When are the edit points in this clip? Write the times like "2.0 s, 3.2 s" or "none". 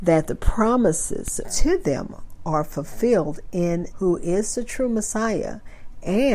1.4 s, 3.9 s